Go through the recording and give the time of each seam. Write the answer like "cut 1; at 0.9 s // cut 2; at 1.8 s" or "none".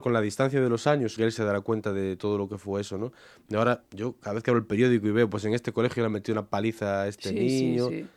cut 1; at 1.2 s